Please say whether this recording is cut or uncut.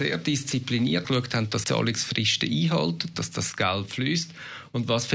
cut